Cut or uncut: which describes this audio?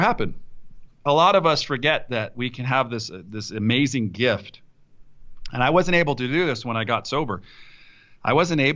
uncut